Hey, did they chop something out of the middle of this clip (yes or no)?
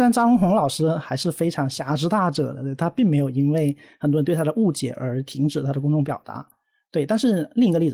no